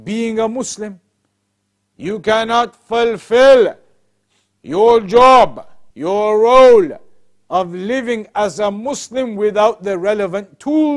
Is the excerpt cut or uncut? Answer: cut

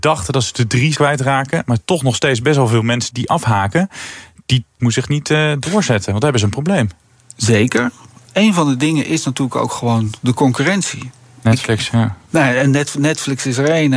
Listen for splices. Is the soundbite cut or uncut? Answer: cut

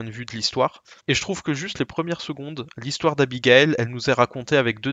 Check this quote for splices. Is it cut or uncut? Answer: cut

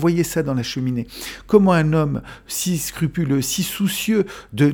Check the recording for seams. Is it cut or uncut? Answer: uncut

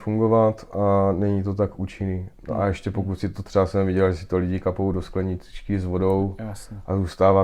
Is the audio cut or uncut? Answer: uncut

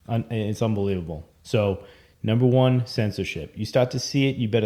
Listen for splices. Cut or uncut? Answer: cut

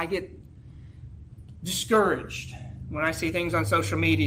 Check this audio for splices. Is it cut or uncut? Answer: uncut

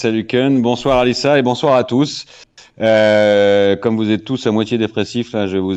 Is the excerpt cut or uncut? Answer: uncut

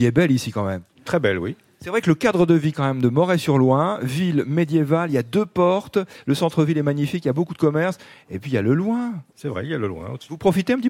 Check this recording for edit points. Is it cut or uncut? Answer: uncut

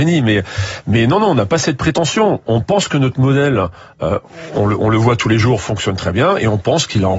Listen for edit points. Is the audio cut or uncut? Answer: uncut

